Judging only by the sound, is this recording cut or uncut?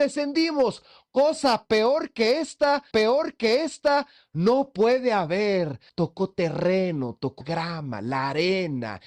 cut